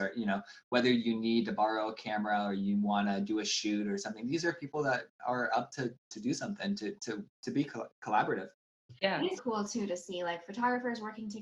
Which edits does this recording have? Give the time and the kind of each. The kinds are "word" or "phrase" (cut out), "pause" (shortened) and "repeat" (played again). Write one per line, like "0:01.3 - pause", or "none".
0:09.4 - word